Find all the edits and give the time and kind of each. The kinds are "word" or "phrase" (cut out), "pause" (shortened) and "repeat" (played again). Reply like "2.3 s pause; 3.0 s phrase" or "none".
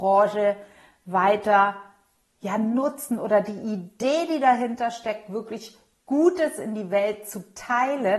none